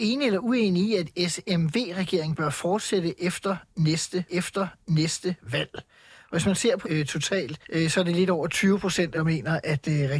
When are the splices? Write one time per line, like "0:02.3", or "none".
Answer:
0:04.3
0:06.8
0:07.6
0:09.1